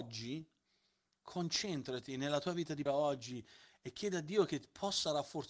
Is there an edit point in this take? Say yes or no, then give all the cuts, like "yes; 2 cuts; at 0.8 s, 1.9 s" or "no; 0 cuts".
yes; 1 cut; at 2.9 s